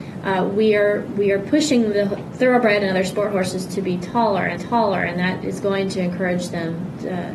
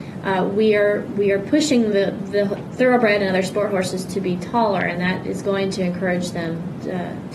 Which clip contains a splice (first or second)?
first